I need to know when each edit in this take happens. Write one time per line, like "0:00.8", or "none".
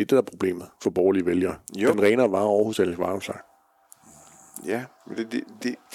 0:01.9